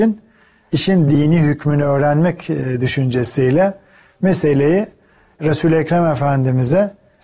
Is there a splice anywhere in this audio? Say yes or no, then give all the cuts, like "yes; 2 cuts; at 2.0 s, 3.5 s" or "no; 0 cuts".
no; 0 cuts